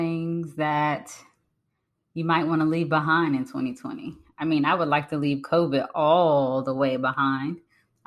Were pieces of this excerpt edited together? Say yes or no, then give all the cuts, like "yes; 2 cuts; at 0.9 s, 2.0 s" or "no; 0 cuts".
no; 0 cuts